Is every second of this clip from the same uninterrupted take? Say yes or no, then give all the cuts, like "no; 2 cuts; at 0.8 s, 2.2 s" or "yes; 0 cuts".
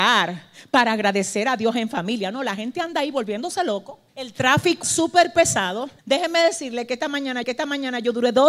no; 4 cuts; at 4.1 s, 4.8 s, 6.0 s, 7.4 s